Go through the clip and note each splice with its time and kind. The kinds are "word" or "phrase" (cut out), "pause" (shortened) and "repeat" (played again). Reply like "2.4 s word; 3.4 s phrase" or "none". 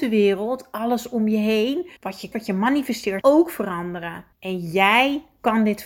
2.0 s pause; 2.3 s word; 3.2 s word; 4.3 s pause